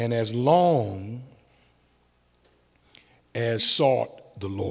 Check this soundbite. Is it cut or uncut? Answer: cut